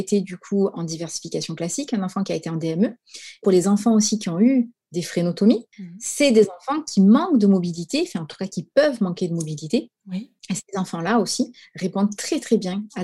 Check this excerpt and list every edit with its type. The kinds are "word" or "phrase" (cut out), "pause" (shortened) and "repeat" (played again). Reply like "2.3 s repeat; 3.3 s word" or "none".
3.4 s phrase; 5.7 s pause; 10.4 s pause